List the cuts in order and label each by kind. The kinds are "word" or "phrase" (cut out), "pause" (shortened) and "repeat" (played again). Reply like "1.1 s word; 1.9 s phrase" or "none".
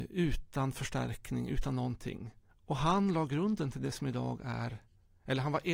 2.5 s pause